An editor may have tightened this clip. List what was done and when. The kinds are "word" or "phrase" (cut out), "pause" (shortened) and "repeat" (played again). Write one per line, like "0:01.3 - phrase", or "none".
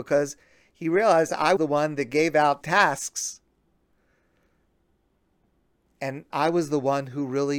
0:01.6 - word
0:02.6 - word
0:06.3 - word